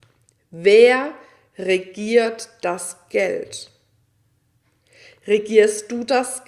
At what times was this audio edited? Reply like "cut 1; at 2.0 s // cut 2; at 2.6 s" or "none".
none